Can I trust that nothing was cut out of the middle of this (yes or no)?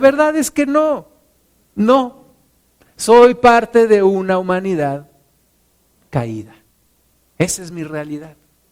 yes